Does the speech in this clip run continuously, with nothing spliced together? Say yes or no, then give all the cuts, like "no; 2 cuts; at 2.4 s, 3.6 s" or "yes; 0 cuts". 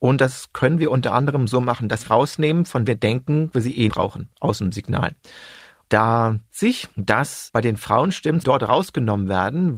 no; 6 cuts; at 2.1 s, 2.9 s, 3.5 s, 3.9 s, 6.5 s, 8.4 s